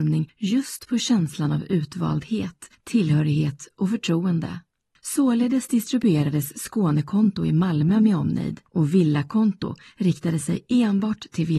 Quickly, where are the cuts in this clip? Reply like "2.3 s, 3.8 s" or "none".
none